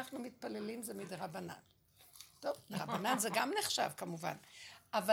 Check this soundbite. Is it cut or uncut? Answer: uncut